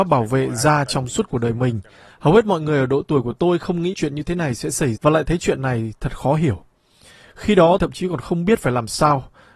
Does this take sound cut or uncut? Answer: cut